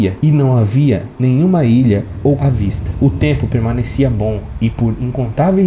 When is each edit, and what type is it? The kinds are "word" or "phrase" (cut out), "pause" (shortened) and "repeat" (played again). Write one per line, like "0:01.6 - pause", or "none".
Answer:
0:02.4 - word